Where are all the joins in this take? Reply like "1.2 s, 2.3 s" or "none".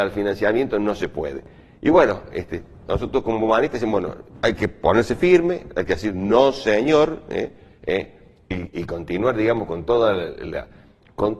none